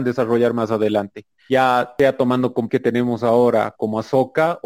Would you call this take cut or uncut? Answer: cut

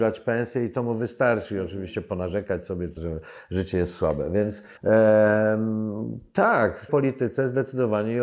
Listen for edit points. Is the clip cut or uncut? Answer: cut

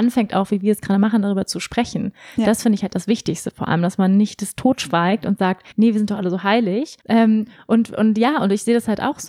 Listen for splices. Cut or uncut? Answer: cut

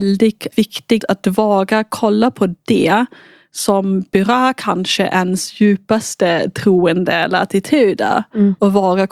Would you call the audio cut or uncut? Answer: cut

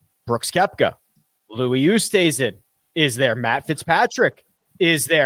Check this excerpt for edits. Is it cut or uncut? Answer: uncut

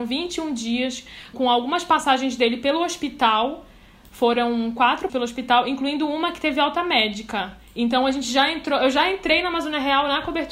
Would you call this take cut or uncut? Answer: cut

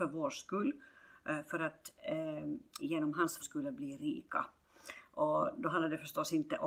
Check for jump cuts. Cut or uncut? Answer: cut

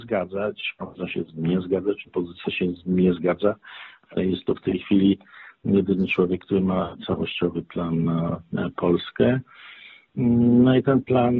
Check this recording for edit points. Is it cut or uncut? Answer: uncut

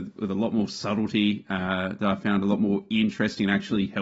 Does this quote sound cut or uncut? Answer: uncut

